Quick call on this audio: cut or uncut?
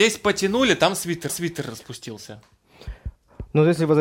cut